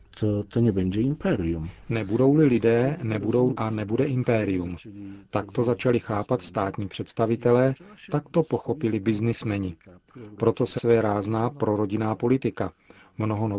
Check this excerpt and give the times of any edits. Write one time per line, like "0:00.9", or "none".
0:03.5
0:10.8